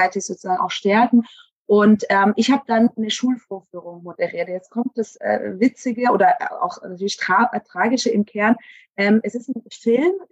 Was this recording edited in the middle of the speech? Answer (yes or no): no